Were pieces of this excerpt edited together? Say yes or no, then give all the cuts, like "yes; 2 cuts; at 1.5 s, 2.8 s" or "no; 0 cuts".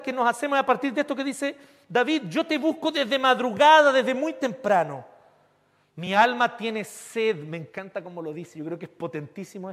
no; 0 cuts